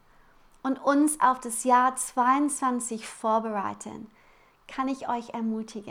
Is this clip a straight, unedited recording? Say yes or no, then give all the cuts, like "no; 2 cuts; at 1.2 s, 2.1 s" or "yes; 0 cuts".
yes; 0 cuts